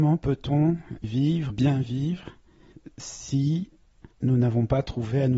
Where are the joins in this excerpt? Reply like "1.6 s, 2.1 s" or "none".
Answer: 1.0 s, 1.5 s, 4.1 s

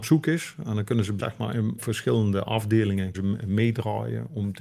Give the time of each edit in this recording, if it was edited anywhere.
1.2 s, 1.8 s, 3.1 s

